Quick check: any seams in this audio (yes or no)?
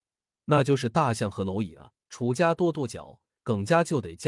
yes